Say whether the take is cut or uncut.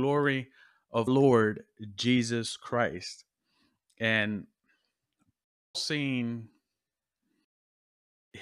cut